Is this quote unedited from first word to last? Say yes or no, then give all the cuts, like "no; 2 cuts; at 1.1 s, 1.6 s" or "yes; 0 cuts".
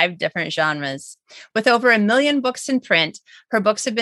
yes; 0 cuts